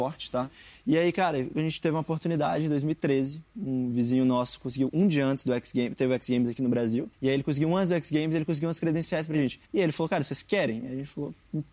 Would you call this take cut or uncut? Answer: cut